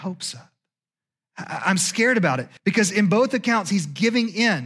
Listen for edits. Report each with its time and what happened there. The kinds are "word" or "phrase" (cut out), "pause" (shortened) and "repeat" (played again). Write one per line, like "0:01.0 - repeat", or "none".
0:02.6 - pause